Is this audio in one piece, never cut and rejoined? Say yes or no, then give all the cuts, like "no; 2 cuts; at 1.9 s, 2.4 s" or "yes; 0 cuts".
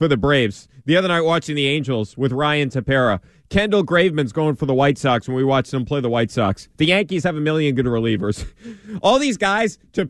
yes; 0 cuts